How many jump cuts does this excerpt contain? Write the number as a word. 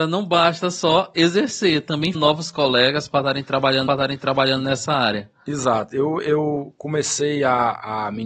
two